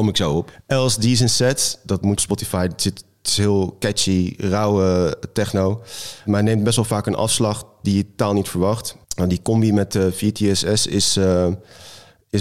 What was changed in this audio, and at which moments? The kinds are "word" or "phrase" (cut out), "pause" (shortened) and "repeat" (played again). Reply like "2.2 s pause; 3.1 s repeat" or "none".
2.2 s phrase; 9.0 s pause